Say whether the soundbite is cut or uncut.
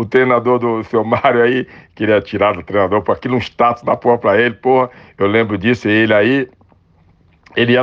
uncut